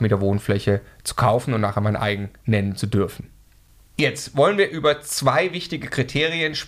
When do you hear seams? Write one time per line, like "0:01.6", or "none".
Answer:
none